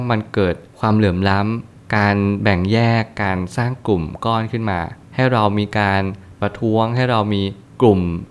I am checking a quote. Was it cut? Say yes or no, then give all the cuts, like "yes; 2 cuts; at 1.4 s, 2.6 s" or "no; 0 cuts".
no; 0 cuts